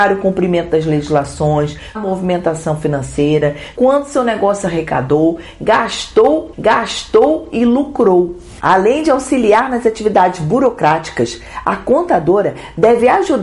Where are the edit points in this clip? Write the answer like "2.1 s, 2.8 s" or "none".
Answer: 1.9 s, 3.8 s, 6.5 s